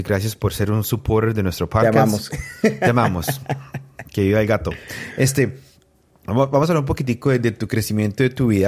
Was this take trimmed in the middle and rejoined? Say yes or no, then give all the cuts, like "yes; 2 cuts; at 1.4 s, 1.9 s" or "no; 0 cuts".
no; 0 cuts